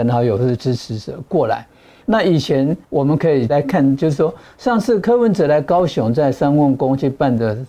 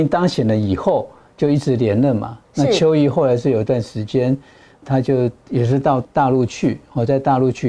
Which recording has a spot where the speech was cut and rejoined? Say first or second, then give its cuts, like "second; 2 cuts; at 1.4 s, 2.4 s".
first; 1 cut; at 2.8 s